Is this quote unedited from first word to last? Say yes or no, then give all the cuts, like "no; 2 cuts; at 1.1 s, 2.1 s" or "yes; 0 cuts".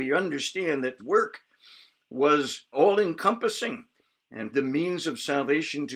no; 3 cuts; at 1.0 s, 2.7 s, 4.5 s